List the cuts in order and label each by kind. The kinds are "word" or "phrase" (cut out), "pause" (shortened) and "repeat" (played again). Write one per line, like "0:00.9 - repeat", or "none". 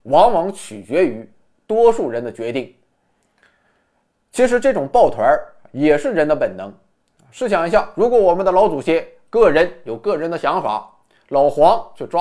none